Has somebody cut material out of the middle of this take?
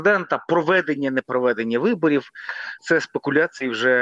yes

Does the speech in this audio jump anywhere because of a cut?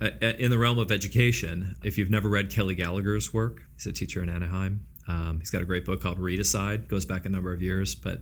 yes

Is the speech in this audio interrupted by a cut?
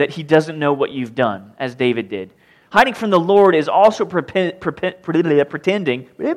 no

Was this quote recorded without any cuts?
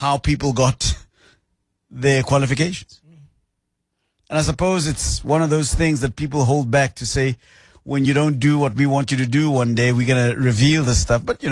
yes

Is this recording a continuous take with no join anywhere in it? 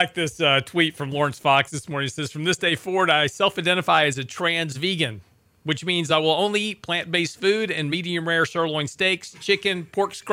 yes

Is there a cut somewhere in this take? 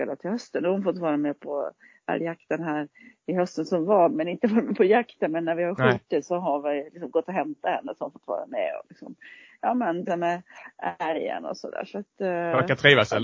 yes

